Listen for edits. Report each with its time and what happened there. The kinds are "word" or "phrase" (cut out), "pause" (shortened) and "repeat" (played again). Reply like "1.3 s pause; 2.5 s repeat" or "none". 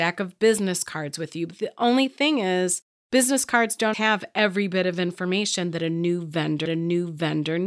3.9 s word; 6.7 s repeat